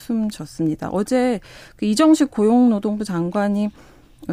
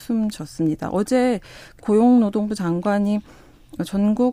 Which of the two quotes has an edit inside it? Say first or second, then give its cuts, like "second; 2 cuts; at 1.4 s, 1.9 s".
second; 1 cut; at 1.8 s